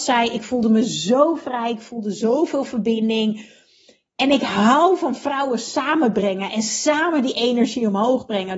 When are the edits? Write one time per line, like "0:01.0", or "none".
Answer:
none